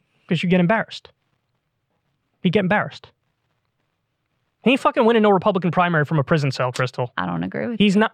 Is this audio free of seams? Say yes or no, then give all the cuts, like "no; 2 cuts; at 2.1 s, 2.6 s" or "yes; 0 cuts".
yes; 0 cuts